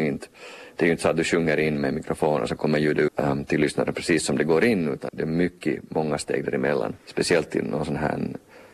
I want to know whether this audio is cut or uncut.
cut